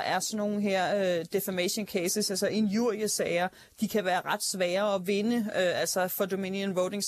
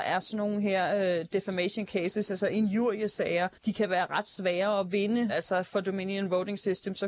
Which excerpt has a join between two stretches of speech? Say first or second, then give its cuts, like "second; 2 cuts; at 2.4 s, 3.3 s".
second; 2 cuts; at 3.5 s, 5.3 s